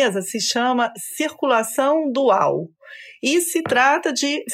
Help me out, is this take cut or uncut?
uncut